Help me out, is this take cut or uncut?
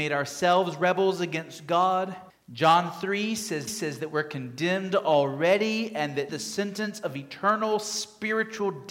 cut